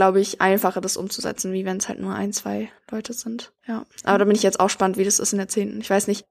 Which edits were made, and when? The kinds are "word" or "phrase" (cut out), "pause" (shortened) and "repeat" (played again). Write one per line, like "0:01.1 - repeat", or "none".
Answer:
0:03.6 - pause